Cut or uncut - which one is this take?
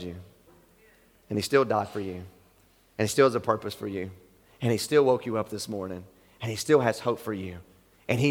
uncut